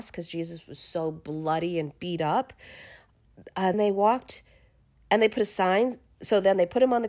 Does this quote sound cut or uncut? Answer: cut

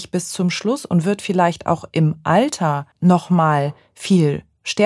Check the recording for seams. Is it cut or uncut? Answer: cut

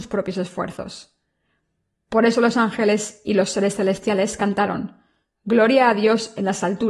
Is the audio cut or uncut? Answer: uncut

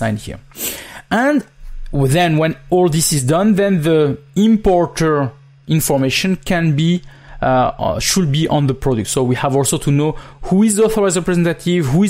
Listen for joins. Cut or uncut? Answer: uncut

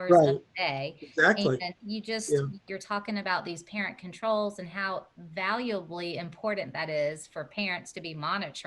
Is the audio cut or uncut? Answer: cut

